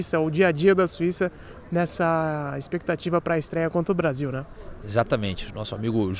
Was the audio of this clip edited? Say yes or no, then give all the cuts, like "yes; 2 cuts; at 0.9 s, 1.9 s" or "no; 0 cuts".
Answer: no; 0 cuts